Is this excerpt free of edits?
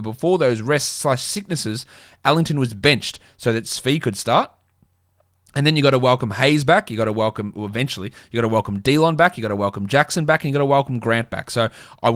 yes; 0 cuts

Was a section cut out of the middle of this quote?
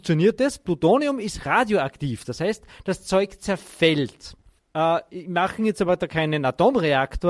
yes; 1 cut; at 4.6 s

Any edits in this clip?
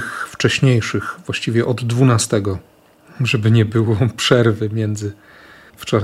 no; 0 cuts

